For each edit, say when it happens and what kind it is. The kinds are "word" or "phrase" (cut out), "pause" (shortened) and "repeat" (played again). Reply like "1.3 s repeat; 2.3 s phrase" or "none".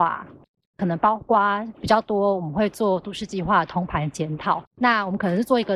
1.7 s pause; 4.7 s pause